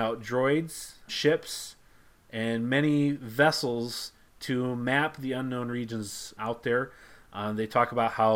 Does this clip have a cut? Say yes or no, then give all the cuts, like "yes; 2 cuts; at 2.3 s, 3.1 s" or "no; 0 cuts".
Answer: yes; 2 cuts; at 1.1 s, 6.4 s